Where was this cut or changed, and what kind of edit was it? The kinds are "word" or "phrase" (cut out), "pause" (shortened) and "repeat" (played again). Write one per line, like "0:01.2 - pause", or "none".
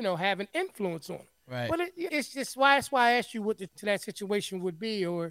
0:01.4 - pause
0:02.1 - phrase
0:03.7 - word